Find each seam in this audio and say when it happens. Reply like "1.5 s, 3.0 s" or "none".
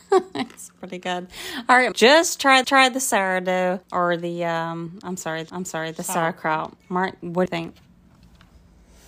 1.9 s, 2.6 s, 3.8 s, 5.5 s, 6.8 s, 7.5 s

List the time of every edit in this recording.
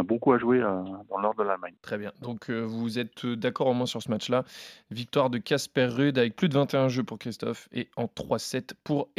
1.8 s

